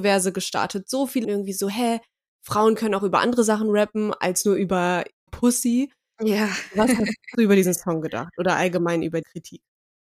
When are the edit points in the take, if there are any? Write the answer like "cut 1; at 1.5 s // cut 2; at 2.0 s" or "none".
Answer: cut 1; at 1.2 s // cut 2; at 5.3 s // cut 3; at 7.3 s // cut 4; at 9.2 s